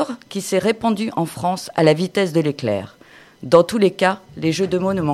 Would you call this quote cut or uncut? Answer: uncut